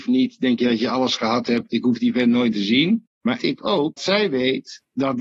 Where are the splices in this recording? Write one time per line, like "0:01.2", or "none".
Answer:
0:02.5
0:03.4
0:04.0